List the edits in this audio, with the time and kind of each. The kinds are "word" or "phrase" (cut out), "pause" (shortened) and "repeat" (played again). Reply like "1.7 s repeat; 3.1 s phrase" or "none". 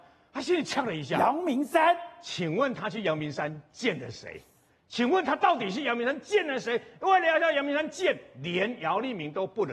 none

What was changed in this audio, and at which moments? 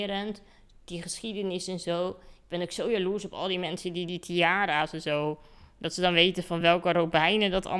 none

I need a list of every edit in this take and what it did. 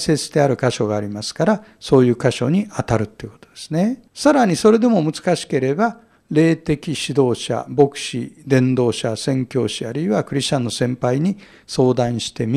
4.1 s pause

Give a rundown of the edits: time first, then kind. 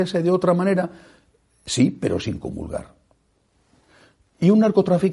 none

